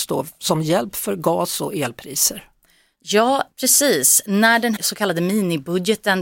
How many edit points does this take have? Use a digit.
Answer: 1